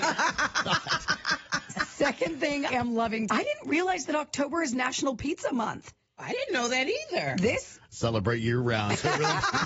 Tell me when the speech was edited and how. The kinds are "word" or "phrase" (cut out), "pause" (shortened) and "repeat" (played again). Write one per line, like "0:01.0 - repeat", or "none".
0:02.7 - word
0:03.3 - word